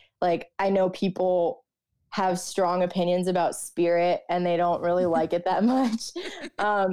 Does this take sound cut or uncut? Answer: uncut